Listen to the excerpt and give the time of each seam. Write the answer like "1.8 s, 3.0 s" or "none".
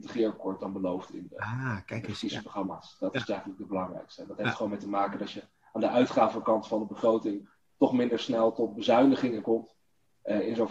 none

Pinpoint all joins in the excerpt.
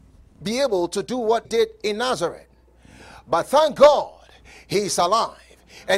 1.4 s

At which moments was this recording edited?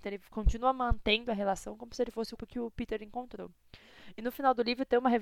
2.4 s

